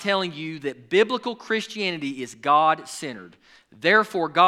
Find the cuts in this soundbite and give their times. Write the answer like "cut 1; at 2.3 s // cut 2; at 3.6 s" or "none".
none